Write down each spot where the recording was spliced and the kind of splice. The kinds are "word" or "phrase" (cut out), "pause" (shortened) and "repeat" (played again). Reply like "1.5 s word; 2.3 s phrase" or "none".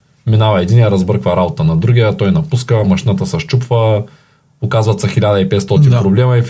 none